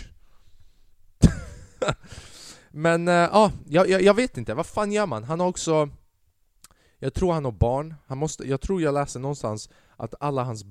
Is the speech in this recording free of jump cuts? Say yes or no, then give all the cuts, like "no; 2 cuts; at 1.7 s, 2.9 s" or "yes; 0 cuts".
yes; 0 cuts